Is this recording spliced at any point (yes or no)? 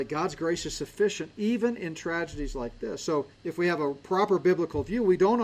yes